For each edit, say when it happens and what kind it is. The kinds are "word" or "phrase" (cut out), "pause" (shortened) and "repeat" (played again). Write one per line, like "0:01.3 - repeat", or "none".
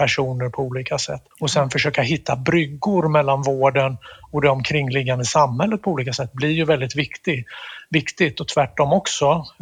0:01.3 - pause